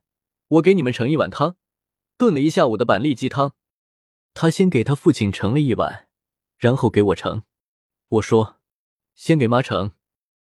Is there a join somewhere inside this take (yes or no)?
no